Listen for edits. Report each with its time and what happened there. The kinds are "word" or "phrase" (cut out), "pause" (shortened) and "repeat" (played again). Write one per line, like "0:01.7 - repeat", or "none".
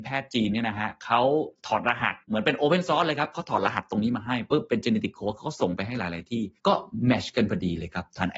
0:02.2 - pause

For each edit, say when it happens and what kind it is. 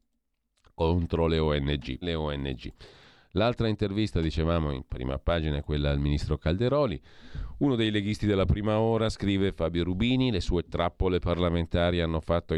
0:02.0 - phrase

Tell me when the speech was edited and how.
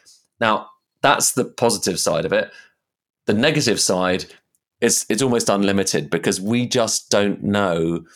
none

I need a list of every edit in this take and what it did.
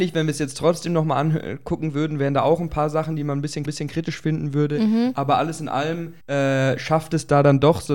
0:03.7 - repeat
0:06.2 - pause

